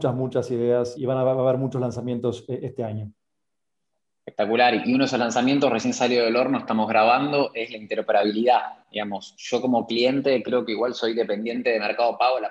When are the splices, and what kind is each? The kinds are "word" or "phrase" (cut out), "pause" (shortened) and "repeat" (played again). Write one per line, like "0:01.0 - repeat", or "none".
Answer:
0:01.0 - word